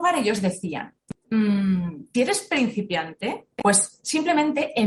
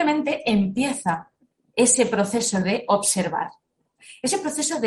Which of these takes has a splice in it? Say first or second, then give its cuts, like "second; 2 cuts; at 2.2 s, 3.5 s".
first; 2 cuts; at 2.1 s, 3.5 s